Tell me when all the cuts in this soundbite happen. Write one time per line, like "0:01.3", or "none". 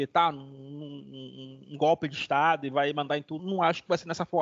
0:03.4